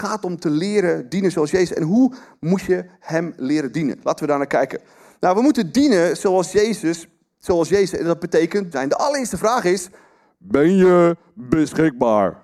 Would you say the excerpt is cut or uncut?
cut